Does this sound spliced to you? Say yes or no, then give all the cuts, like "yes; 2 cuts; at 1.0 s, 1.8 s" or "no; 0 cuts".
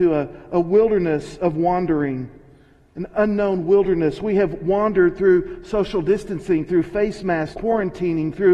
yes; 1 cut; at 7.5 s